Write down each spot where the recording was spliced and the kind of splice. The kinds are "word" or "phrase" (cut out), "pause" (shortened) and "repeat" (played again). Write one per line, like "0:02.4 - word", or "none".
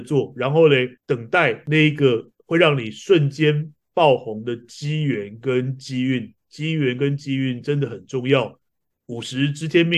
0:01.0 - pause